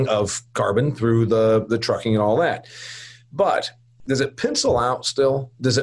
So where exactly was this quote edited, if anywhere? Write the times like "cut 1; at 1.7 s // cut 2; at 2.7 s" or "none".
none